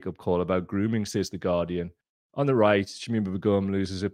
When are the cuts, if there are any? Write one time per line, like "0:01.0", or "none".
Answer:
0:02.0